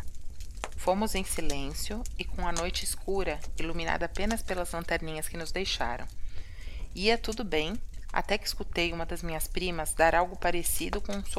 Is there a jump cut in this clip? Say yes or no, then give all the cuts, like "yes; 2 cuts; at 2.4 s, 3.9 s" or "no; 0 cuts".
no; 0 cuts